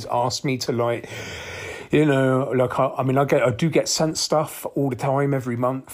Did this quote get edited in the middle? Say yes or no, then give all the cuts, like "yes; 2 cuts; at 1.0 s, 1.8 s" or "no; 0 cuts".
no; 0 cuts